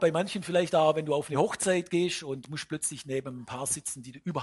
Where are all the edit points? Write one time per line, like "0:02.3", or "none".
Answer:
none